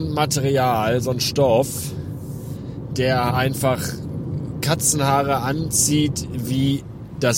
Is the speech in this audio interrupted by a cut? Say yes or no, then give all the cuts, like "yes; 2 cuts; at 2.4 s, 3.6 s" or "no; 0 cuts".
yes; 1 cut; at 3.3 s